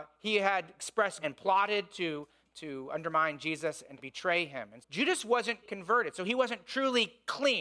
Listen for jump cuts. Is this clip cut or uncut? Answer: cut